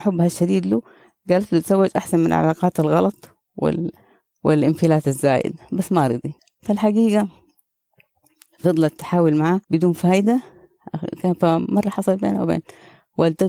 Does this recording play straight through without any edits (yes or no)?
no